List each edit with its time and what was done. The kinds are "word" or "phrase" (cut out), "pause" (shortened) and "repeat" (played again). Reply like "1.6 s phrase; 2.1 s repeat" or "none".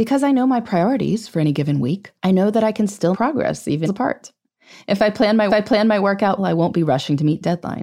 2.2 s pause; 3.1 s word; 3.9 s phrase; 5.5 s repeat; 6.4 s word